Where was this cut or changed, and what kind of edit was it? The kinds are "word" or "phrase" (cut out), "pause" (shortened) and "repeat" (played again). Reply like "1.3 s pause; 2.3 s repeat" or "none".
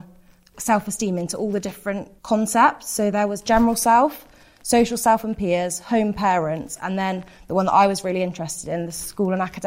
2.2 s pause